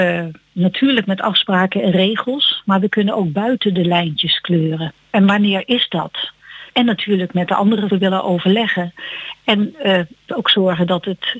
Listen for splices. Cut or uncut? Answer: cut